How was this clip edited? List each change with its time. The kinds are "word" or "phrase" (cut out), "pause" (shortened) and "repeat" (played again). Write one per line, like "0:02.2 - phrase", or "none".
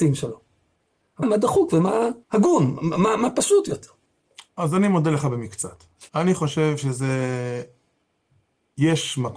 0:01.2 - word
0:02.2 - pause
0:04.5 - pause
0:06.1 - pause